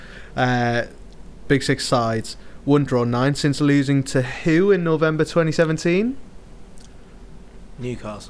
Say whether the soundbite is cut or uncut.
cut